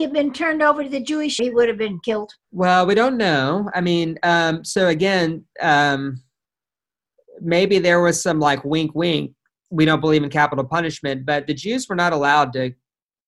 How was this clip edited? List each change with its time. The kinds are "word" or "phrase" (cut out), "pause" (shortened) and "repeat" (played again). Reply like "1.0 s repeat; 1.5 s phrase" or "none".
1.4 s phrase; 2.4 s pause